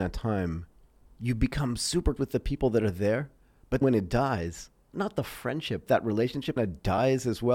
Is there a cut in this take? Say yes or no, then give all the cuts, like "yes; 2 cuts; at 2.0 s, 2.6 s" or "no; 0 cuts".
yes; 5 cuts; at 2.2 s, 3.8 s, 4.9 s, 5.9 s, 6.6 s